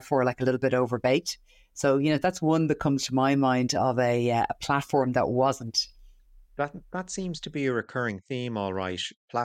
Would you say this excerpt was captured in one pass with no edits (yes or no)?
yes